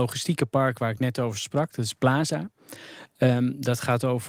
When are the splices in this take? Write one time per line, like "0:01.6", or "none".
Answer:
none